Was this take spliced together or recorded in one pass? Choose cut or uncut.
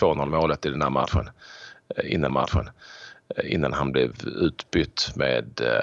cut